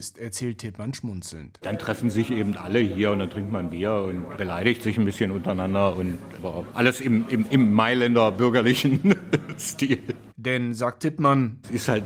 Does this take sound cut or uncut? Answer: uncut